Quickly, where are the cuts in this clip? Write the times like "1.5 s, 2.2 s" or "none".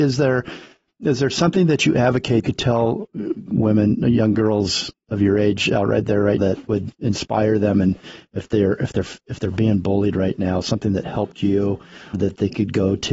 2.4 s, 6.4 s, 12.1 s